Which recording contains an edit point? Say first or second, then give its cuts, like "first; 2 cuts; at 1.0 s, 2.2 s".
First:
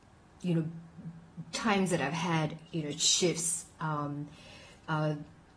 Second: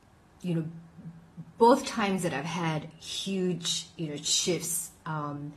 first; 2 cuts; at 1.5 s, 2.7 s